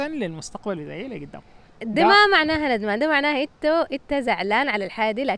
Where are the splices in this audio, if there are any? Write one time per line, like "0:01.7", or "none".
none